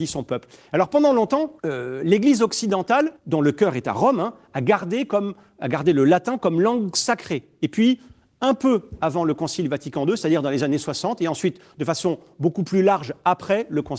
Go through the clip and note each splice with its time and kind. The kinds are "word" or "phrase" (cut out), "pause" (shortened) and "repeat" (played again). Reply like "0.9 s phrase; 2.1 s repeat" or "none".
1.6 s pause; 3.2 s pause

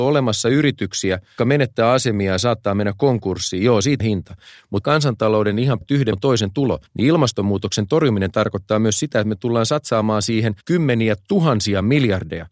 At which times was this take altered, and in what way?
1.4 s word; 4.0 s word; 4.8 s phrase; 5.8 s word; 6.1 s word; 6.9 s pause; 10.6 s pause

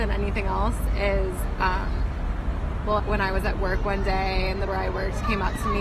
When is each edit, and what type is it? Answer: 3.0 s phrase; 4.7 s word

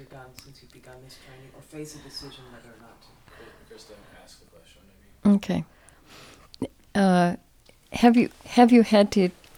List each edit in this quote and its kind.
none

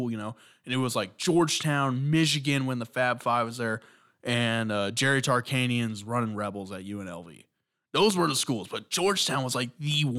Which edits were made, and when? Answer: none

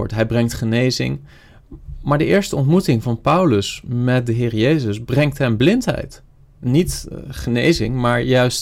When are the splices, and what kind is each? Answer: none

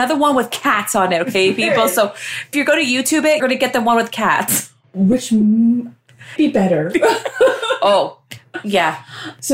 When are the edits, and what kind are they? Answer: 2.5 s word; 3.4 s word; 6.4 s word

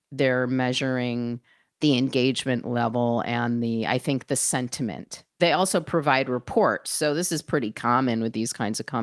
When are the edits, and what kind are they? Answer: none

